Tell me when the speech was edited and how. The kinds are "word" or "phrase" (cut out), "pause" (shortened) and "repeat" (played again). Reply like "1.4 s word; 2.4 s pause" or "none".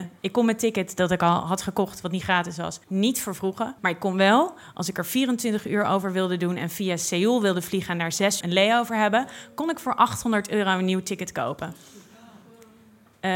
2.8 s pause; 3.8 s pause; 8.4 s word